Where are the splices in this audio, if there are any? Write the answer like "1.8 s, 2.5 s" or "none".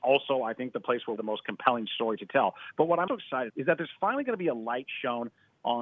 1.2 s, 3.1 s, 3.5 s